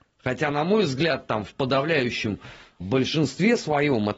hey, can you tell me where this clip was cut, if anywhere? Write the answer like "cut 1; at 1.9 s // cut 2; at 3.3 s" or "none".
cut 1; at 2.8 s